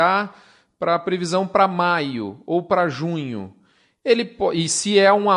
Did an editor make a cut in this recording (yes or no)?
no